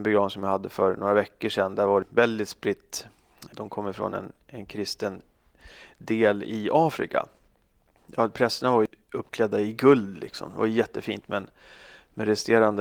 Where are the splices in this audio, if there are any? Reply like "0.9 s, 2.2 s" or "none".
none